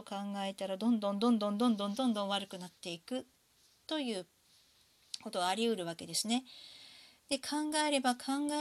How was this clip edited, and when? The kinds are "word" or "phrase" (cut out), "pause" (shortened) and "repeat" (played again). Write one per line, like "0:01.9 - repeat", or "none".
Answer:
none